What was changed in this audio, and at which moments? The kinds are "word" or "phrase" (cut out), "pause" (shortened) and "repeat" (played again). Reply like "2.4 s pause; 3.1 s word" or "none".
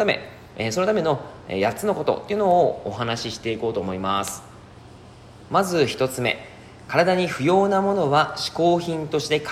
5.5 s pause